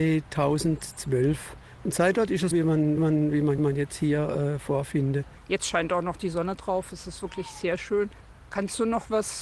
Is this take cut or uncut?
cut